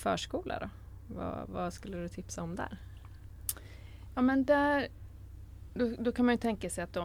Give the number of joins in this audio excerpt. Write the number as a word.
zero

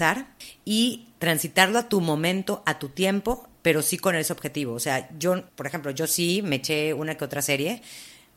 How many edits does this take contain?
one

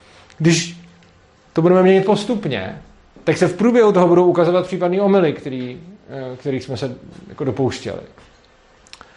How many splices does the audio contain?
zero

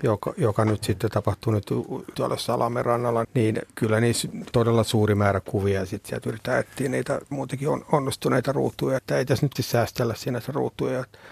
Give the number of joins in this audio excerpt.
seven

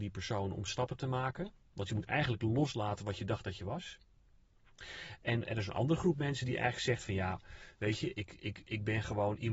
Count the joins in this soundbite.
zero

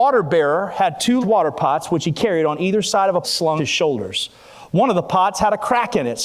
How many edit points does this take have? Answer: three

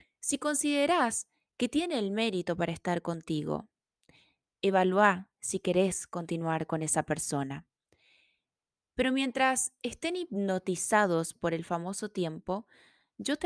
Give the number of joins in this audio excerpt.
zero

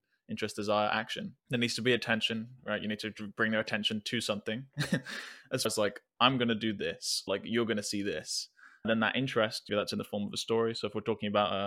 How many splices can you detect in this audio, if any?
five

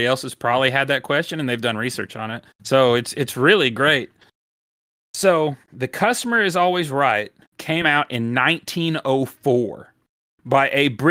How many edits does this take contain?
three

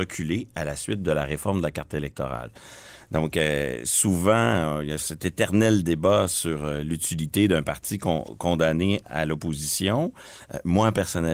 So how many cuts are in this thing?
one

